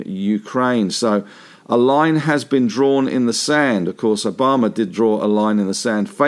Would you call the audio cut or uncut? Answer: uncut